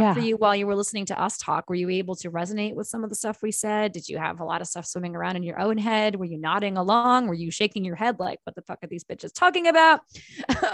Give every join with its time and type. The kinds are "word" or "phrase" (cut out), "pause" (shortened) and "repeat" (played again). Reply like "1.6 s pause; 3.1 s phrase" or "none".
none